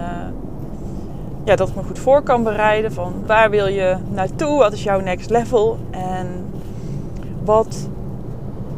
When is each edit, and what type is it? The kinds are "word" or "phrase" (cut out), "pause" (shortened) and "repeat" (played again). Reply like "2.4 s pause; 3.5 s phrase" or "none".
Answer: 3.3 s word